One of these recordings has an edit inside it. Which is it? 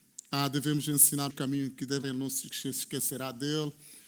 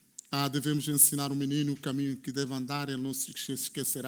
first; 2 cuts; at 1.3 s, 2.0 s

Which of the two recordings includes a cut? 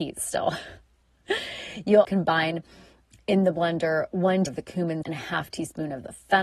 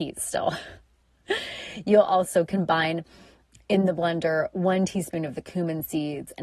first; 3 cuts; at 2.0 s, 4.5 s, 5.0 s

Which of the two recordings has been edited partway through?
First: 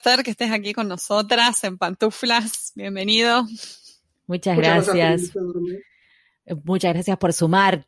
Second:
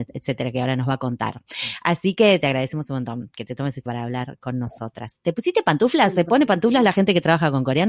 second; 1 cut; at 3.9 s

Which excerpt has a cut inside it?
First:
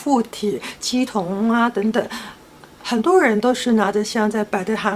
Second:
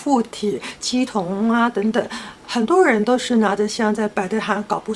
second; 1 cut; at 2.4 s

